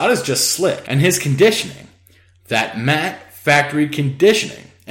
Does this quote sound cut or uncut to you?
uncut